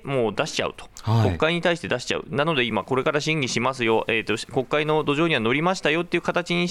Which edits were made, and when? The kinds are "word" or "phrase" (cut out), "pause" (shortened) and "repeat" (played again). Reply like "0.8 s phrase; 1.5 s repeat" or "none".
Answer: none